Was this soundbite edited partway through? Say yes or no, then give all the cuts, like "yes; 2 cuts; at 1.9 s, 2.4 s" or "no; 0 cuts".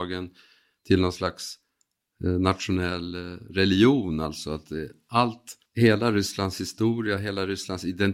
yes; 1 cut; at 5.7 s